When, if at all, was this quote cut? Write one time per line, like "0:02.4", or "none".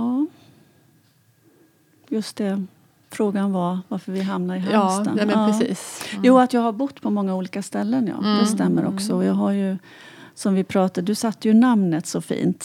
none